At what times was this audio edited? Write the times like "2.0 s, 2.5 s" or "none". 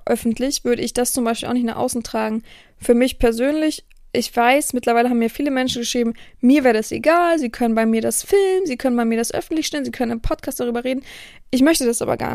none